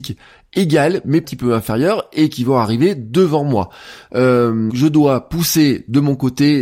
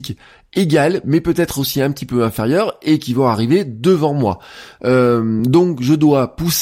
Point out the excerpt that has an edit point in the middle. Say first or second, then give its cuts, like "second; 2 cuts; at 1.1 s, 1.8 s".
first; 2 cuts; at 1.2 s, 4.7 s